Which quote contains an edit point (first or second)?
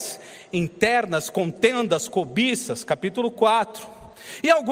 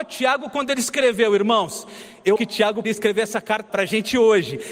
second